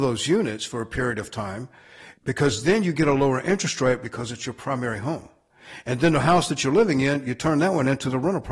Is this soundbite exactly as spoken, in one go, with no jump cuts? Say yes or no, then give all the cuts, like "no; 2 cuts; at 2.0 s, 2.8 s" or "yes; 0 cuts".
no; 1 cut; at 2.2 s